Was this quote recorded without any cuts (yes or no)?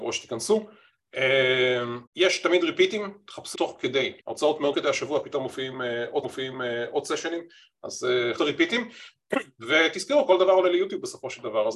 no